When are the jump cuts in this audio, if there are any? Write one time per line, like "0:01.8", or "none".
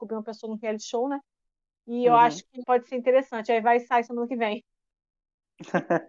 0:02.6